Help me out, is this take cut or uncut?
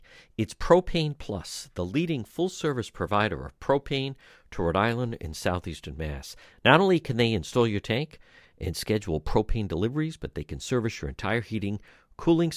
uncut